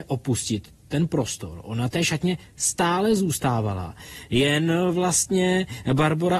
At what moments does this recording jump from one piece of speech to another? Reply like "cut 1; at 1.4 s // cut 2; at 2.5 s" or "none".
cut 1; at 1.9 s

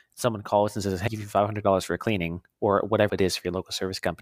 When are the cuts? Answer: cut 1; at 1.1 s // cut 2; at 3.1 s

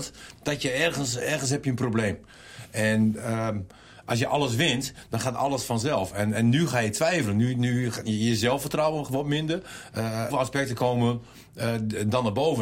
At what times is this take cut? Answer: cut 1; at 10.3 s

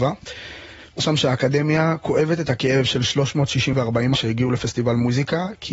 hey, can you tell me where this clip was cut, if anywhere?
cut 1; at 1.0 s // cut 2; at 3.7 s // cut 3; at 4.1 s

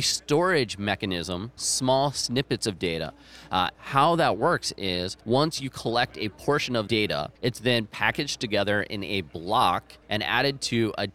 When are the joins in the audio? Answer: cut 1; at 1.6 s // cut 2; at 3.7 s // cut 3; at 5.2 s // cut 4; at 6.9 s // cut 5; at 7.4 s // cut 6; at 10.0 s

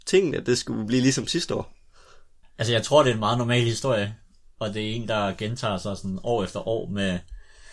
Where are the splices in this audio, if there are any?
none

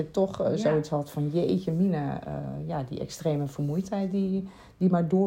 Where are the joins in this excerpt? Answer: none

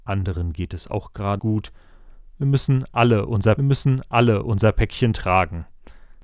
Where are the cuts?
cut 1; at 1.4 s // cut 2; at 3.6 s

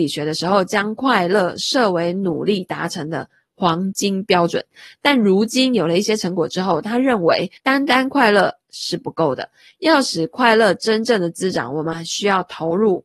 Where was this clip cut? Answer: cut 1; at 7.6 s

